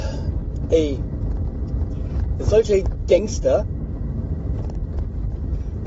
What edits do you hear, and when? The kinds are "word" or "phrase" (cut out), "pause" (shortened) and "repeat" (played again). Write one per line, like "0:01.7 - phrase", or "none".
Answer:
none